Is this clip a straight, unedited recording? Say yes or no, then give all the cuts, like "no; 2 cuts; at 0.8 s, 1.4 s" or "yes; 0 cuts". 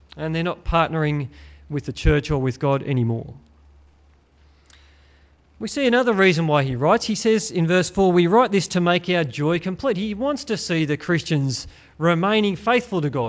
yes; 0 cuts